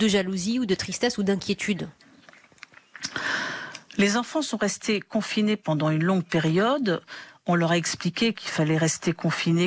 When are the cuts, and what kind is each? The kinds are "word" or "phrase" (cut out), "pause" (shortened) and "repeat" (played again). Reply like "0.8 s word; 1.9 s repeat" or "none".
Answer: none

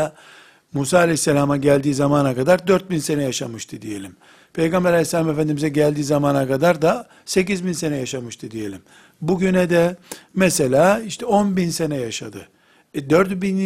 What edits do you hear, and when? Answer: none

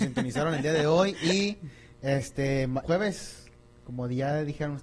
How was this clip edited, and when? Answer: 2.8 s word

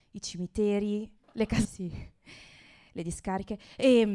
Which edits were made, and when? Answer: 1.2 s pause; 1.6 s word

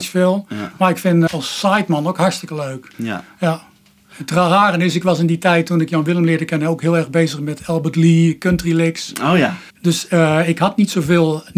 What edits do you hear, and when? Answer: 1.3 s word; 2.9 s pause; 9.7 s pause

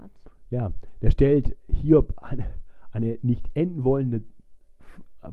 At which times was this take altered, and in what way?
none

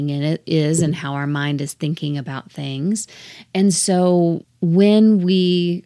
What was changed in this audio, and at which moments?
none

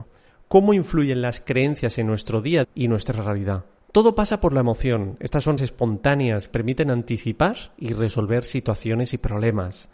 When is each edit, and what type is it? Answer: 2.6 s word; 5.6 s word; 6.5 s word

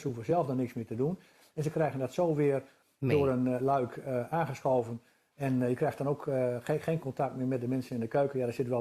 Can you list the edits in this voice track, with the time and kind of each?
none

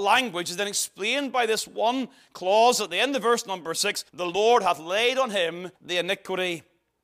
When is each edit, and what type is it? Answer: 4.1 s pause; 5.8 s pause

